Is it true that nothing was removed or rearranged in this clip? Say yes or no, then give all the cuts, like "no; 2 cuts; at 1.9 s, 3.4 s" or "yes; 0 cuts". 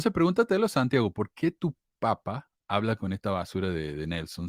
yes; 0 cuts